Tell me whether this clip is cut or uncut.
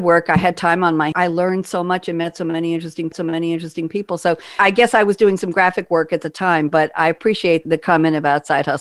cut